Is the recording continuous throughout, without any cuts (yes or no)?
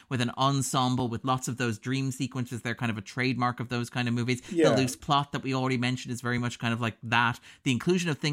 yes